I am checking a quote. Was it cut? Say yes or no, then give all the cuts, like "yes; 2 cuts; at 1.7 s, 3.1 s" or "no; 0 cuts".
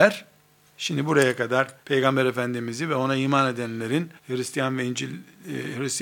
yes; 2 cuts; at 1.8 s, 4.2 s